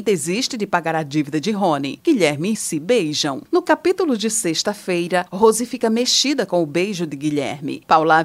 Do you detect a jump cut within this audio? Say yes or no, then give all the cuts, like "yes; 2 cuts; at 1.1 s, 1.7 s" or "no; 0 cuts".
yes; 1 cut; at 2.5 s